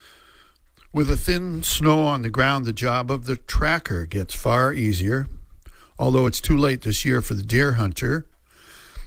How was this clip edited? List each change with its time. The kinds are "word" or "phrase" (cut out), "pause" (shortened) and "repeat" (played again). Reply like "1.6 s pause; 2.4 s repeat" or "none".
none

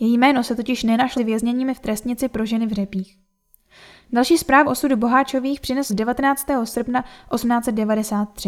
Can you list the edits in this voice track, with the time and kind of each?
1.2 s word; 4.7 s word; 5.9 s word

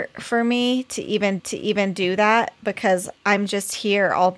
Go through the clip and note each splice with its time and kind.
1.4 s repeat; 3.2 s pause

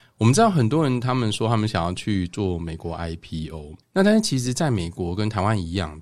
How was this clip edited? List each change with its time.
3.8 s pause

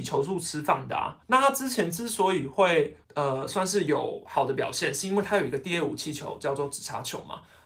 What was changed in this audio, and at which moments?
1.2 s pause; 3.0 s pause

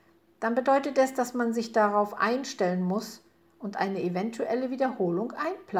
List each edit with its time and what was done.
none

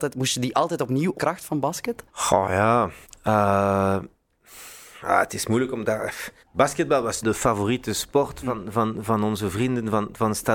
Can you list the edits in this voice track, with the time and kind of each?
1.1 s phrase; 2.1 s pause; 3.0 s pause; 6.4 s pause; 7.2 s phrase

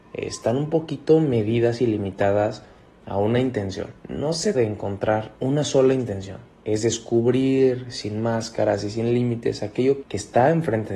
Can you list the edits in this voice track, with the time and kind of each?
4.0 s pause; 4.5 s word; 5.4 s pause; 6.5 s pause; 10.0 s word

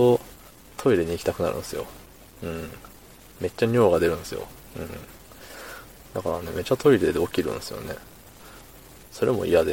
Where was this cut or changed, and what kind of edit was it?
none

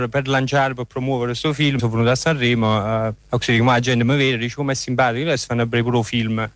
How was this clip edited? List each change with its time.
1.8 s word; 3.2 s pause

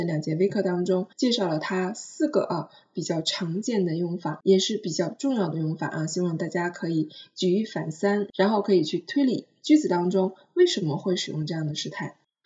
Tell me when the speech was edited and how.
1.1 s pause

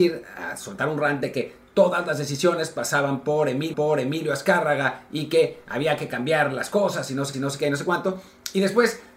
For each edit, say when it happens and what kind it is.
3.7 s repeat; 7.3 s repeat

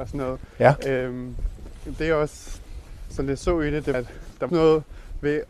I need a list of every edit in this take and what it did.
2.0 s word; 3.9 s word; 4.5 s word

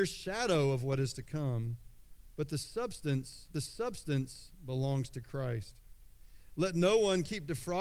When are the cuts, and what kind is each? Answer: 3.5 s repeat

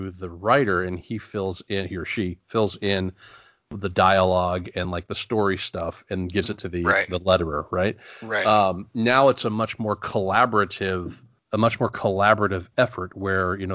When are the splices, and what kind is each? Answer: none

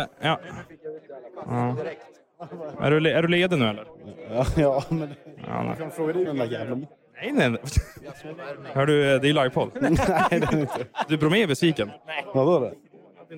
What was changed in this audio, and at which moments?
6.3 s word

